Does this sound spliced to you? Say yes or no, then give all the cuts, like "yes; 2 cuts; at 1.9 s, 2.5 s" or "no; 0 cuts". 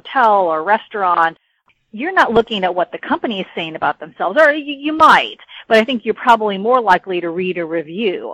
no; 0 cuts